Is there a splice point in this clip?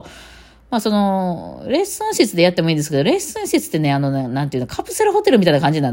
no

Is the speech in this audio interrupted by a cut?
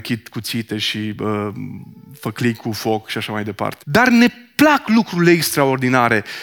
no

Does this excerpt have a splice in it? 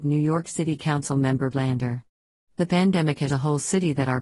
yes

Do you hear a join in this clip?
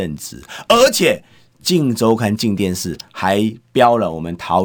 no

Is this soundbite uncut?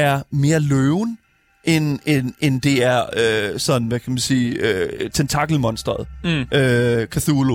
yes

